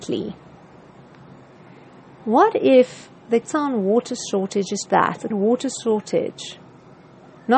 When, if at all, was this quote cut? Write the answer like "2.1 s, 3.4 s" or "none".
3.4 s, 4.9 s, 5.3 s